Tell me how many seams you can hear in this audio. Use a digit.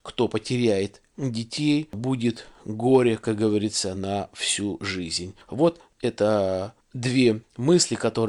0